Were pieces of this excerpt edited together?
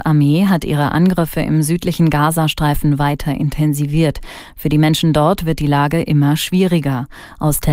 no; 0 cuts

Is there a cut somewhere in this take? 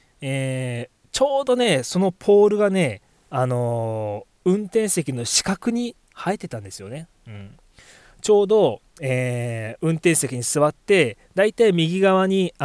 yes; 1 cut; at 6.0 s

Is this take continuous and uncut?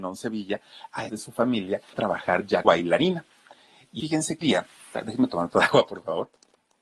no; 7 cuts; at 1.1 s, 1.9 s, 2.6 s, 4.0 s, 4.4 s, 4.9 s, 5.5 s

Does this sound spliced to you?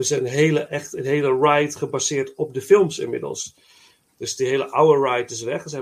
no; 0 cuts

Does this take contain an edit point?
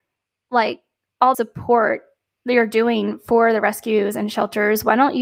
yes; 1 cut; at 1.3 s

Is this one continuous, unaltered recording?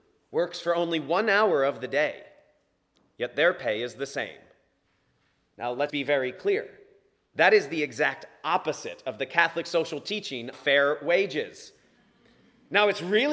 no; 2 cuts; at 5.9 s, 10.5 s

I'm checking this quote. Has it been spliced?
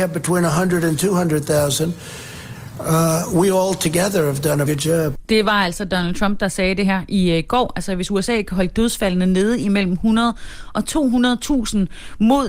yes; 1 cut; at 4.7 s

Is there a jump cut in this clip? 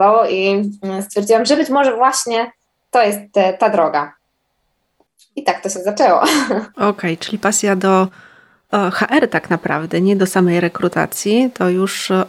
no; 0 cuts

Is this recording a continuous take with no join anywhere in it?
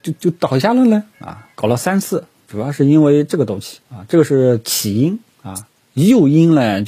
no; 2 cuts; at 1.5 s, 3.8 s

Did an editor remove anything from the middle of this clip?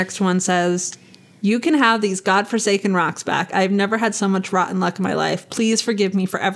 no; 0 cuts

